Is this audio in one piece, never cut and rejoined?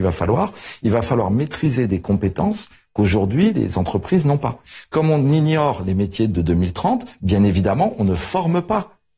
yes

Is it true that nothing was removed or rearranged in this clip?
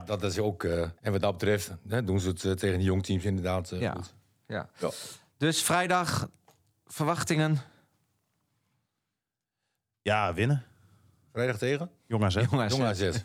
no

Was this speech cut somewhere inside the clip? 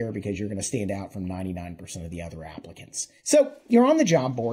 yes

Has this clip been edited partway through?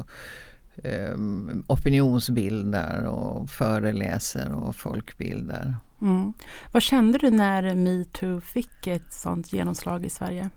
no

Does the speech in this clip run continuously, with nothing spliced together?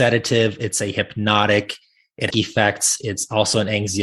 no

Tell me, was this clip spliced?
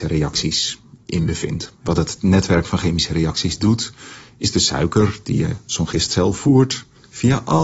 no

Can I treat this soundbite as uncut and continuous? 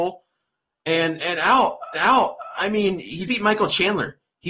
no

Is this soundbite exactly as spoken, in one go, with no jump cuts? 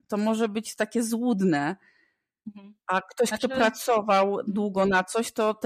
yes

